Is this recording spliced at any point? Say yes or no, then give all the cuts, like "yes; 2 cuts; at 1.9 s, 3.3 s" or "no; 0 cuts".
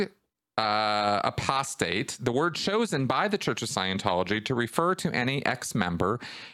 no; 0 cuts